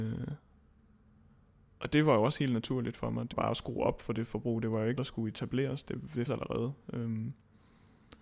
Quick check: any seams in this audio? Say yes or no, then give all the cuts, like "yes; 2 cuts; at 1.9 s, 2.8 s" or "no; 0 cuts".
yes; 3 cuts; at 3.3 s, 5.0 s, 6.3 s